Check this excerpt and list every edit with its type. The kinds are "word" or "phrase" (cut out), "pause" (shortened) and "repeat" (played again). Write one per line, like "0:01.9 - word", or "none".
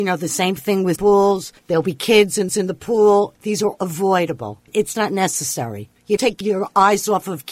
0:01.0 - word
0:01.6 - pause
0:02.5 - repeat
0:03.8 - word
0:04.9 - word
0:06.2 - word